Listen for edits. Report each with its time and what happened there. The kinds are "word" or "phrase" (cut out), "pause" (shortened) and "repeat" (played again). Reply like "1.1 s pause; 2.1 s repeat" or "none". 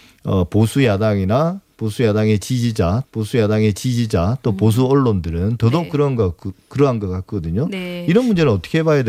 3.0 s repeat

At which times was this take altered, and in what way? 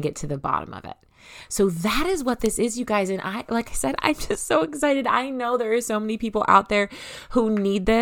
none

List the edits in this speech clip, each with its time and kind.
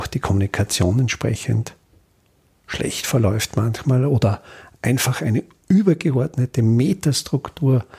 none

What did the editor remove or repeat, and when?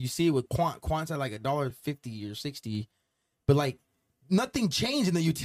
none

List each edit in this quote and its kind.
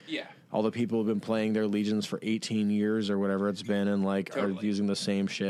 none

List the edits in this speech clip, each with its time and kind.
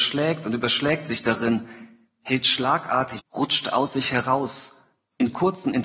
3.2 s word

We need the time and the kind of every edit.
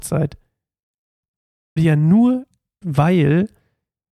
1.8 s word; 2.8 s word

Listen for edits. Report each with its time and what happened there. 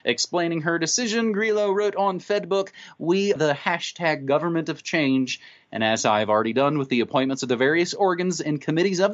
3.4 s word

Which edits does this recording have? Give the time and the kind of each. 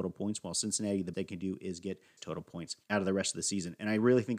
1.1 s word; 2.2 s word; 2.8 s pause

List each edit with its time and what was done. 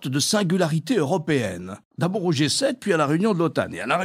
none

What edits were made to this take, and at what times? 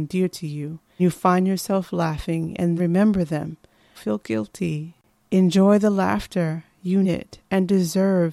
1.0 s word; 2.8 s word; 3.9 s word; 7.0 s word

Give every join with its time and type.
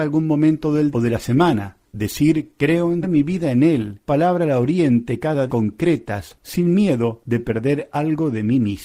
0.9 s word; 1.9 s pause; 3.0 s phrase; 4.1 s phrase; 5.5 s phrase

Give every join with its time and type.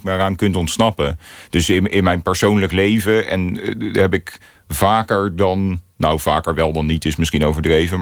none

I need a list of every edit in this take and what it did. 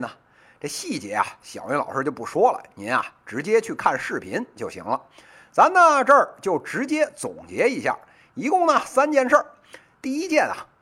none

